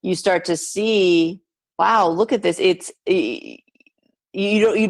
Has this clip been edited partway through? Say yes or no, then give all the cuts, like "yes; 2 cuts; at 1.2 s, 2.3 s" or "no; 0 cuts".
no; 0 cuts